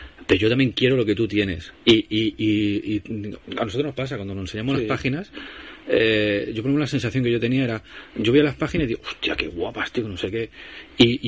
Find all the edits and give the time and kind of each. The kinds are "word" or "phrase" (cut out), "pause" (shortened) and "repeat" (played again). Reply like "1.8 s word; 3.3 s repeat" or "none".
1.8 s pause